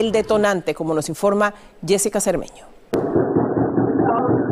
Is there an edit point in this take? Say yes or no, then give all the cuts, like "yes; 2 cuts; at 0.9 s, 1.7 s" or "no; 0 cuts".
no; 0 cuts